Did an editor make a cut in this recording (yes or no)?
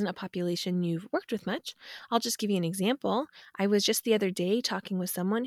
no